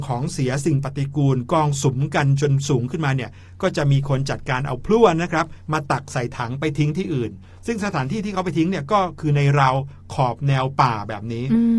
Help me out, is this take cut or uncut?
uncut